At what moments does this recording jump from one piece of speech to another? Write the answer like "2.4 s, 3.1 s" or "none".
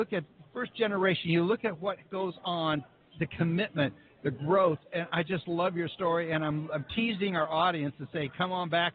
none